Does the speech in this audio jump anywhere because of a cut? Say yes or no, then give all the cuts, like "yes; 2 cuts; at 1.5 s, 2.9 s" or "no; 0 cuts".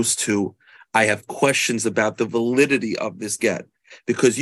no; 0 cuts